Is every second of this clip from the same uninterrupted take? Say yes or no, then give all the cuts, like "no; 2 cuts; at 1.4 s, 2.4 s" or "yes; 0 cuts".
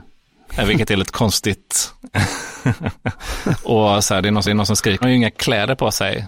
no; 2 cuts; at 4.4 s, 5.0 s